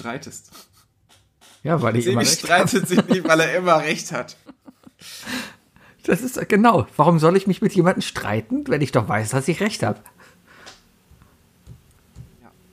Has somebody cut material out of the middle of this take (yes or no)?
no